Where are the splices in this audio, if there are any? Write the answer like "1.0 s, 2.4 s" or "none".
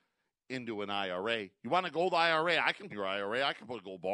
2.9 s